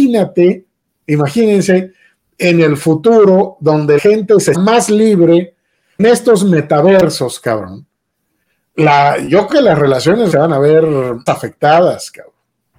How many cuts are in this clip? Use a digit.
6